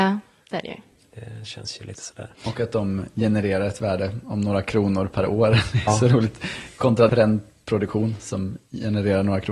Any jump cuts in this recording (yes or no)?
yes